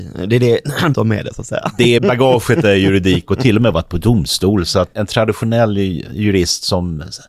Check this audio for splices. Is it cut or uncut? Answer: cut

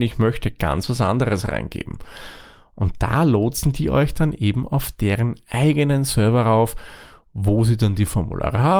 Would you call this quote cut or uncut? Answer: uncut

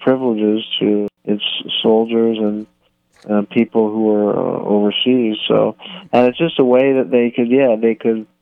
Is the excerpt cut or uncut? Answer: uncut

